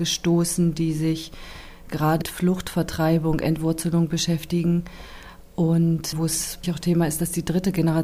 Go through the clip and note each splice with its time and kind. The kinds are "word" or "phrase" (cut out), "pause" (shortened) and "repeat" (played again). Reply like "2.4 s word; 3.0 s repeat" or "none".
2.2 s word; 6.1 s word; 6.6 s word